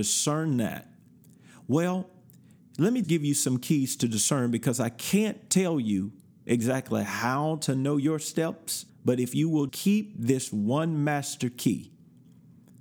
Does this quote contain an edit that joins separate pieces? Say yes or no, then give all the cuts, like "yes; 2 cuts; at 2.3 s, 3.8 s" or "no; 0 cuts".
yes; 3 cuts; at 3.0 s, 8.9 s, 9.7 s